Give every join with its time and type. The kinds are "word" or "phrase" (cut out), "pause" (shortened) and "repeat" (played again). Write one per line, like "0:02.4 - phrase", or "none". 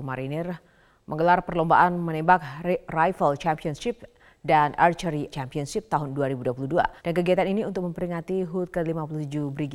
0:05.3 - word
0:07.0 - pause